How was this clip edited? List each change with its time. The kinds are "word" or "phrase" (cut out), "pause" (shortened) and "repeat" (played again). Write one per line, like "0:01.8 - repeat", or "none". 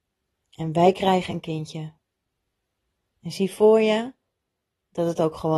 none